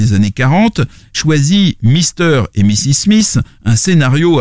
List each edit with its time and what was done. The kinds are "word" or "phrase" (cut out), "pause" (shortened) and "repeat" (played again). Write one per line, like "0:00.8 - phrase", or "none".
0:01.1 - word